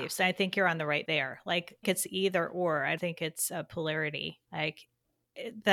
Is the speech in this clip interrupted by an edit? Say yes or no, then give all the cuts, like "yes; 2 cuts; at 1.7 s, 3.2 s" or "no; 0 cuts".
yes; 4 cuts; at 1.0 s, 1.8 s, 3.0 s, 4.4 s